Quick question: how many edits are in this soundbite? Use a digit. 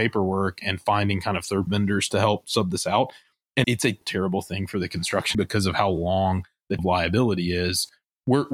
5